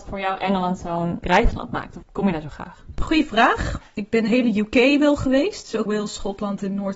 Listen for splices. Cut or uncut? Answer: cut